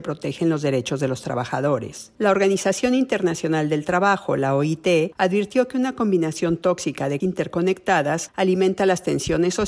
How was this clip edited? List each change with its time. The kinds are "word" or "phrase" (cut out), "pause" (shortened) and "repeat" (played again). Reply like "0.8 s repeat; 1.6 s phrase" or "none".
2.1 s pause; 7.2 s word